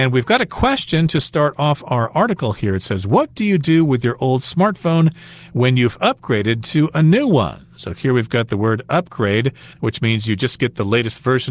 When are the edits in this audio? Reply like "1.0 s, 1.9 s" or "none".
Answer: 9.7 s